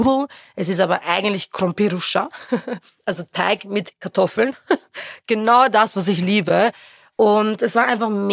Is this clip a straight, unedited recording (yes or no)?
yes